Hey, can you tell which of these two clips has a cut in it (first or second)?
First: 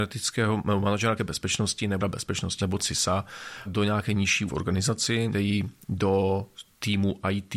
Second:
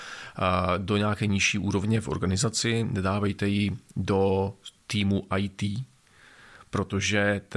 first